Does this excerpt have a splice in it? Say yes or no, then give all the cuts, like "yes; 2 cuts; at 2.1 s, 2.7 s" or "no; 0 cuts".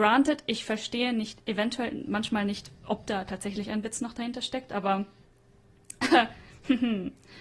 no; 0 cuts